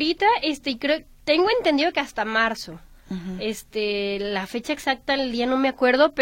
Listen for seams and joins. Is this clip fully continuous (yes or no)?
yes